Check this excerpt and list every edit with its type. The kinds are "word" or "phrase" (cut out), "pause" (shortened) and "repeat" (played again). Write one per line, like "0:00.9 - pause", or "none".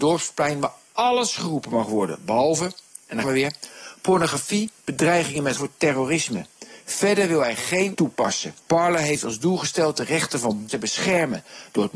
0:03.2 - word
0:05.6 - phrase
0:07.9 - word
0:08.6 - pause
0:10.7 - word